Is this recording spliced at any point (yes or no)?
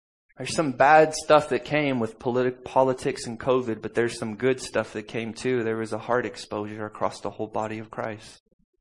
no